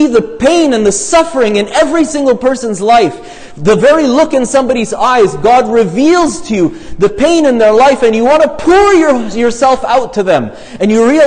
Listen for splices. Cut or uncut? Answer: uncut